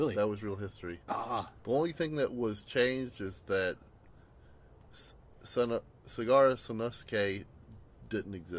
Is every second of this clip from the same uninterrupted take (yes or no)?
yes